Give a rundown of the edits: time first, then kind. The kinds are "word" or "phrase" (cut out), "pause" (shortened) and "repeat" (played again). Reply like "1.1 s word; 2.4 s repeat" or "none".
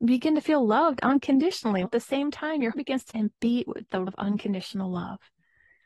1.9 s word; 2.7 s word; 3.1 s word; 4.1 s word